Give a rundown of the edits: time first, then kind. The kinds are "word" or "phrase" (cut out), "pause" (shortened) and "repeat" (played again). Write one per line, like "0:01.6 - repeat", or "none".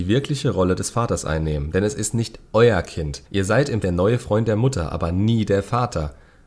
0:03.3 - pause
0:03.8 - phrase